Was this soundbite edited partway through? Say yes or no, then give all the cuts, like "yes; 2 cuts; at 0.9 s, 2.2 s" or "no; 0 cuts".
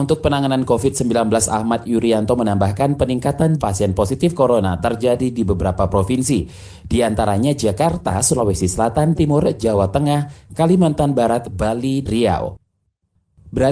yes; 3 cuts; at 3.6 s, 9.2 s, 12.1 s